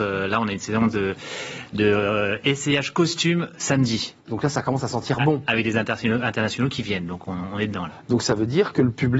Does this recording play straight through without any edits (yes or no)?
no